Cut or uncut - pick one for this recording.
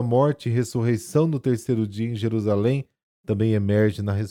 uncut